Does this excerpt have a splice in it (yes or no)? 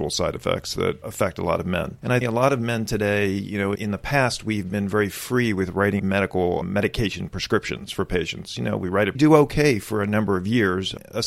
yes